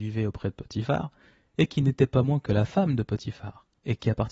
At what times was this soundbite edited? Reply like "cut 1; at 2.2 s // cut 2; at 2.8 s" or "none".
none